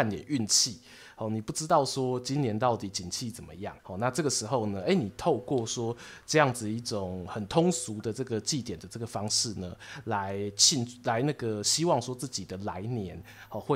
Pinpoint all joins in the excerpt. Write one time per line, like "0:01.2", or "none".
0:03.8